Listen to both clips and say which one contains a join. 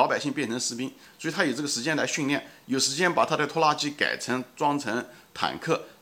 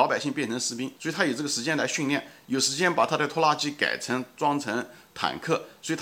second; 1 cut; at 1.0 s

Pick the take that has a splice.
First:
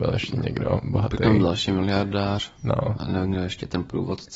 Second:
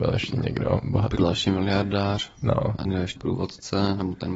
second; 3 cuts; at 1.2 s, 2.8 s, 3.2 s

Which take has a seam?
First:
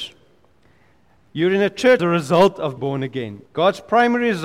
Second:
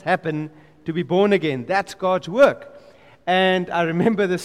first; 3 cuts; at 2.0 s, 2.8 s, 3.5 s

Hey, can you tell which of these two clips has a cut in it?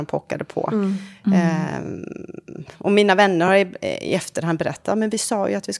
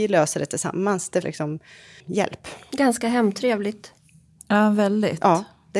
second; 2 cuts; at 1.2 s, 2.0 s

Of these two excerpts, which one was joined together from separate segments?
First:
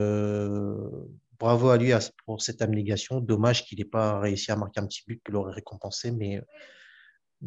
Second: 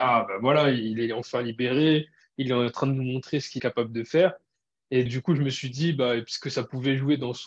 second; 2 cuts; at 3.6 s, 5.1 s

